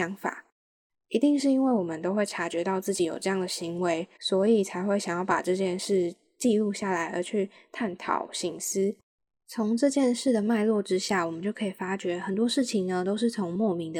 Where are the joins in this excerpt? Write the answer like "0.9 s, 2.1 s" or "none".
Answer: 4.2 s